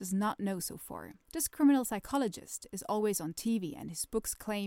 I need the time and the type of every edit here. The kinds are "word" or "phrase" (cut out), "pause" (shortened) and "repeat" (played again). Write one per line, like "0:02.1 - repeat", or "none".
0:01.2 - pause